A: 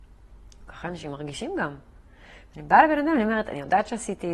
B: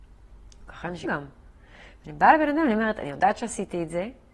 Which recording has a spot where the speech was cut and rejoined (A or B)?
B